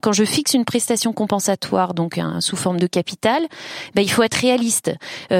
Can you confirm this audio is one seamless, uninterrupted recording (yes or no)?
yes